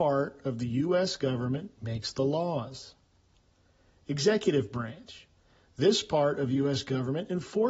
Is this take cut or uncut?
uncut